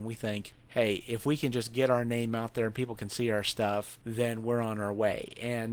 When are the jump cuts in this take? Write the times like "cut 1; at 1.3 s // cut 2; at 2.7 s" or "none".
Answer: none